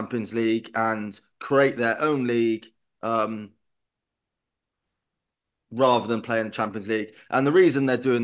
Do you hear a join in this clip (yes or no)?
no